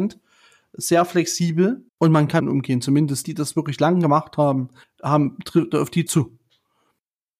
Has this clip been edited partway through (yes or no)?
yes